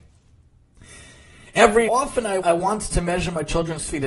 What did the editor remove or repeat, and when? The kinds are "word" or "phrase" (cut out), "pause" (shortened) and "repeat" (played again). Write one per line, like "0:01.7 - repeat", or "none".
0:01.9 - word
0:02.4 - word